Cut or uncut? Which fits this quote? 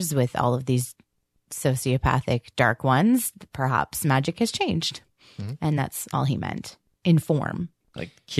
uncut